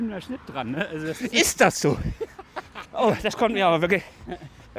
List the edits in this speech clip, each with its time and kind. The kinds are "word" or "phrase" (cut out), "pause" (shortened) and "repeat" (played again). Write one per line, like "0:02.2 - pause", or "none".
none